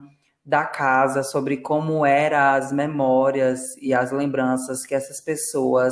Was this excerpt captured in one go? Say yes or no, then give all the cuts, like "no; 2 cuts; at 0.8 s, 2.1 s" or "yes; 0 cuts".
yes; 0 cuts